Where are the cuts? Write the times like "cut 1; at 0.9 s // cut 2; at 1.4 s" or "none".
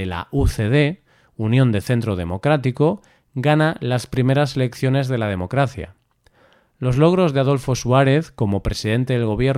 none